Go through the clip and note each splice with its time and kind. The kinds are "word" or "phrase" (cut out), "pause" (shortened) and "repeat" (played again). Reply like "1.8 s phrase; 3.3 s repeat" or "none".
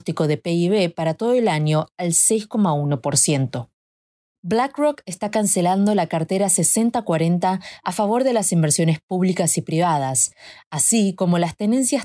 none